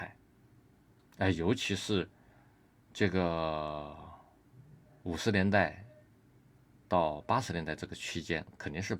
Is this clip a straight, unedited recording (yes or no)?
yes